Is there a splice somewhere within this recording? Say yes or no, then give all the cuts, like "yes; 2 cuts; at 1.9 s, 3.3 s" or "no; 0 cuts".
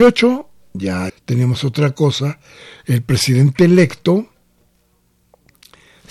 yes; 1 cut; at 1.1 s